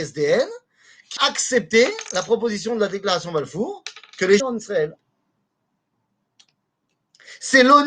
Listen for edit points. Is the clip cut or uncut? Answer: cut